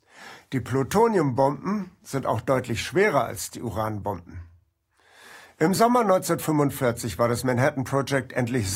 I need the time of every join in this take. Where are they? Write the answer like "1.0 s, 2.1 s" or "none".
none

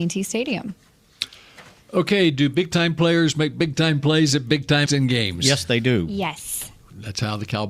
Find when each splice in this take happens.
4.9 s

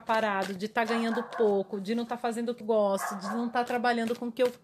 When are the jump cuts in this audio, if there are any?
2.6 s

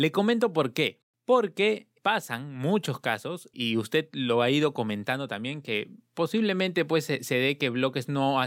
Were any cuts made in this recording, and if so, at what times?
3.5 s

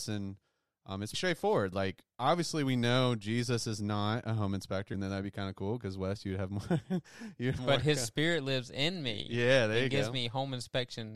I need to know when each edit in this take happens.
1.1 s, 4.9 s, 7.6 s

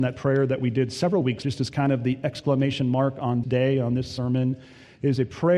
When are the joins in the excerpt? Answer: 1.4 s, 3.4 s

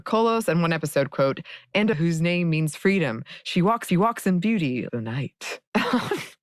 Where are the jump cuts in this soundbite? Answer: 1.9 s, 3.9 s, 4.9 s

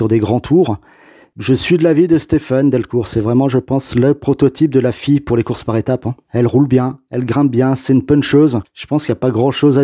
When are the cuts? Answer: none

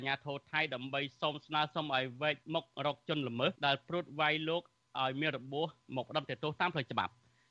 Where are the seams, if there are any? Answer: 2.4 s, 3.6 s

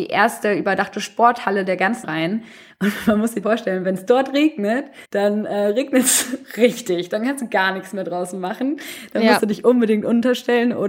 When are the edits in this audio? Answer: 2.0 s, 3.4 s, 5.0 s

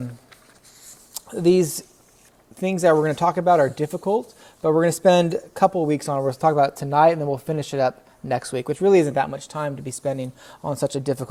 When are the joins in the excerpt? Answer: none

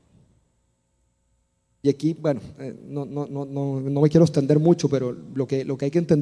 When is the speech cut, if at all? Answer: none

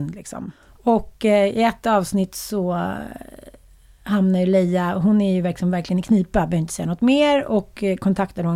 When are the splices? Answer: none

